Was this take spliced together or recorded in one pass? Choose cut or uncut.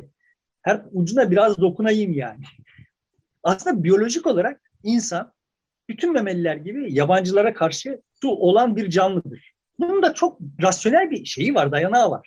cut